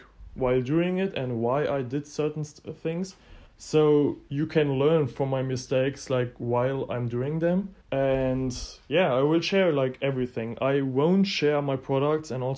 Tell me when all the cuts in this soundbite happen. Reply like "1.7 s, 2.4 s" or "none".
3.5 s, 7.8 s